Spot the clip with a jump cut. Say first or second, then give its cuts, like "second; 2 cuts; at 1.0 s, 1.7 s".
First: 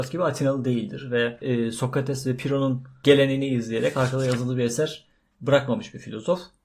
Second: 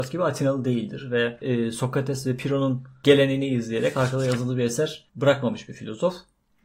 second; 1 cut; at 5.1 s